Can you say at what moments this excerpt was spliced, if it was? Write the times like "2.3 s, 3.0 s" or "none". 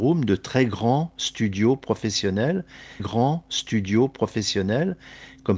3.0 s